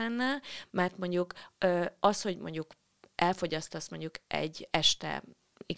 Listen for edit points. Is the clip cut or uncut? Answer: uncut